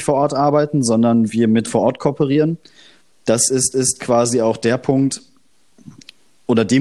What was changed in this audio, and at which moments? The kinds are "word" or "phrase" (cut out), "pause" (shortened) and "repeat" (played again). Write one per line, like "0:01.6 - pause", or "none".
0:01.7 - word
0:03.7 - repeat